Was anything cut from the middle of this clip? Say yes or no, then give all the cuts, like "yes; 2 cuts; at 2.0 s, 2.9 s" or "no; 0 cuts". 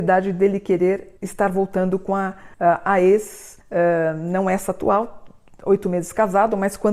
yes; 3 cuts; at 1.2 s, 2.5 s, 3.6 s